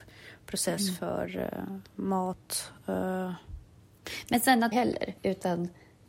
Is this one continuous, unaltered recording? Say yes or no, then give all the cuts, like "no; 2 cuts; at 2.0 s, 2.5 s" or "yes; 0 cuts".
no; 2 cuts; at 4.7 s, 5.2 s